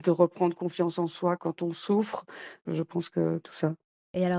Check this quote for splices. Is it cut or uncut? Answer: cut